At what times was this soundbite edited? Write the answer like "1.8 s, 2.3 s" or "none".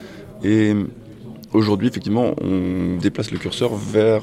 3.0 s